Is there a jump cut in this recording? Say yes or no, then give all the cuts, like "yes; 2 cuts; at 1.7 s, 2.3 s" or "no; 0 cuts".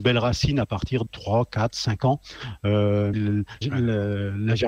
yes; 3 cuts; at 1.1 s, 3.1 s, 3.6 s